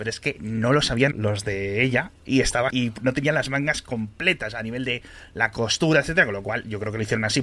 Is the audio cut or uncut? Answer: cut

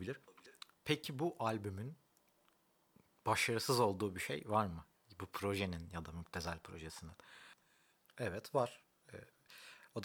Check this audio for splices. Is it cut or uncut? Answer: uncut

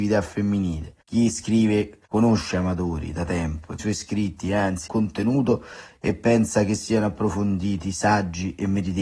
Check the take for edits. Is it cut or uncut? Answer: cut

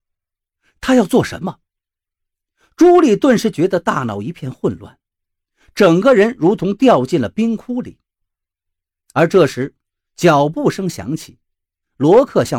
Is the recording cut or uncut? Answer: uncut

